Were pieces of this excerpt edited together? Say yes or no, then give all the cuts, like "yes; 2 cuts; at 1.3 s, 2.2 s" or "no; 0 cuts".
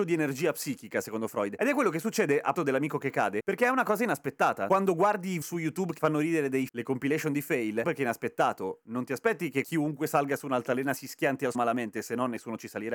yes; 6 cuts; at 2.5 s, 5.4 s, 6.0 s, 6.7 s, 7.8 s, 11.5 s